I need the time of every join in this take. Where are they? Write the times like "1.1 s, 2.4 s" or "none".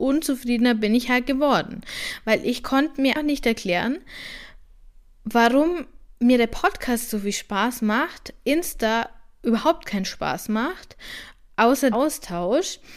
3.1 s, 6.1 s, 11.9 s